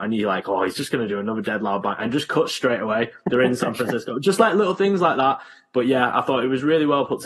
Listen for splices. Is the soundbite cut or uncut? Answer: uncut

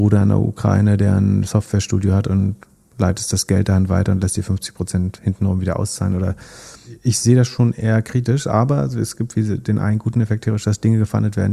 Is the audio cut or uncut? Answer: uncut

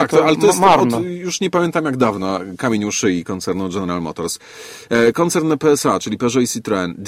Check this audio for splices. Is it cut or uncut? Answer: uncut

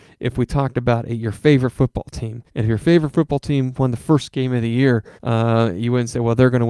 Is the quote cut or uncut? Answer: cut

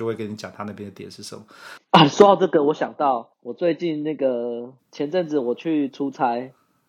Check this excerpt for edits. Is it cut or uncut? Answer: cut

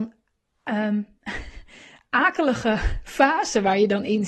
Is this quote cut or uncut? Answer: uncut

